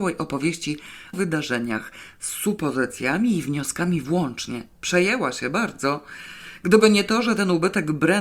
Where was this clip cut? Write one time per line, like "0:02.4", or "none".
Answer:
0:01.1